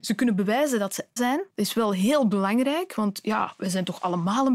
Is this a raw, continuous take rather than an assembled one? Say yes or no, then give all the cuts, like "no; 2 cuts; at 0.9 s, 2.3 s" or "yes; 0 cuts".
no; 2 cuts; at 1.2 s, 1.5 s